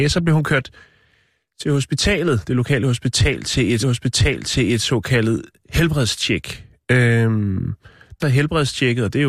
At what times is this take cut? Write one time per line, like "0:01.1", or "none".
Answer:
0:03.8
0:08.2